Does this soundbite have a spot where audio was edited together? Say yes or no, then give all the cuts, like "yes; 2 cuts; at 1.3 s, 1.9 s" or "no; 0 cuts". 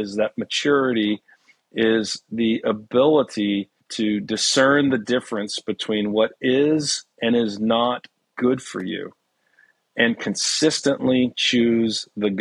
no; 0 cuts